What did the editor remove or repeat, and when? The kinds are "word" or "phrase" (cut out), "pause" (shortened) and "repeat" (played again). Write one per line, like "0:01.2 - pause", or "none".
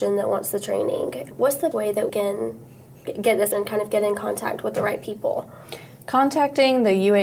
0:01.3 - word
0:01.7 - word
0:02.1 - word
0:03.5 - word